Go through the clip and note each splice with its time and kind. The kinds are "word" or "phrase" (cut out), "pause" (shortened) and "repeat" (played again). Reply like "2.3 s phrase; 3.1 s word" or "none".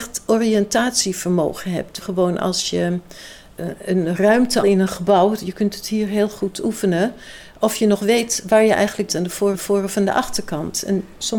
2.0 s phrase; 4.6 s word; 9.1 s word; 9.5 s repeat